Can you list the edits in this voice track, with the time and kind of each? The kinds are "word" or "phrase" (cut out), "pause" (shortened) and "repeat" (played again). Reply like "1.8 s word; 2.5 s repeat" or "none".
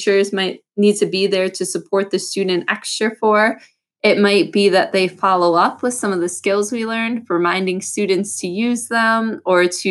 none